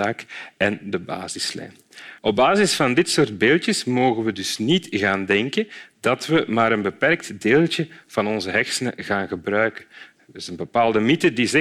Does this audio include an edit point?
yes; 1 cut; at 2.2 s

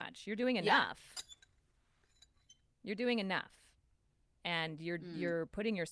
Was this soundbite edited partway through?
no; 0 cuts

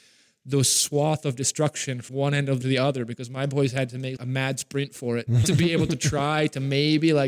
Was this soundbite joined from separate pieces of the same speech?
yes; 4 cuts; at 2.1 s, 2.6 s, 4.2 s, 5.4 s

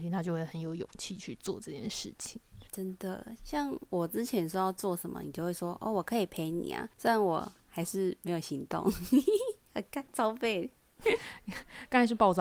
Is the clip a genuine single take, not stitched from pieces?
no; 2 cuts; at 2.7 s, 6.9 s

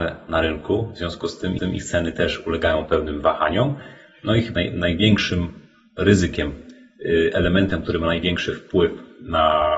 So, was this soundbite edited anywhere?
yes; 2 cuts; at 1.6 s, 4.6 s

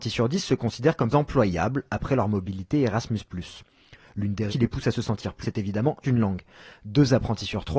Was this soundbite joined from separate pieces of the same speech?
yes; 4 cuts; at 1.1 s, 4.5 s, 5.4 s, 6.0 s

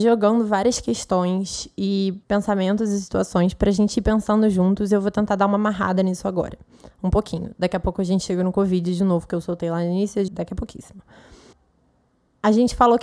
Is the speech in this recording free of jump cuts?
no; 2 cuts; at 2.2 s, 10.3 s

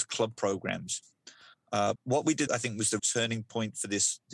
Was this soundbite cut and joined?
yes; 3 cuts; at 2.0 s, 2.5 s, 3.0 s

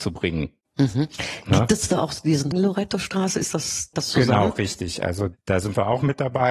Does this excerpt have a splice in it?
yes; 2 cuts; at 2.5 s, 3.9 s

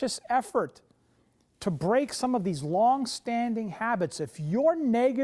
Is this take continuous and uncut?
yes; 0 cuts

